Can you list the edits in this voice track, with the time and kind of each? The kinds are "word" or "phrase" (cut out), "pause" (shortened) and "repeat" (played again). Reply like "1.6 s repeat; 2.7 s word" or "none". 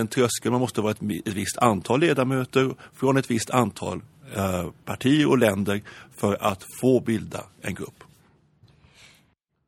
none